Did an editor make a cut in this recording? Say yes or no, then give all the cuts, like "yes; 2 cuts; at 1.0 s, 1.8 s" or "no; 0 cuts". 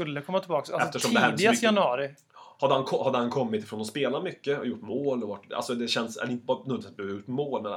no; 0 cuts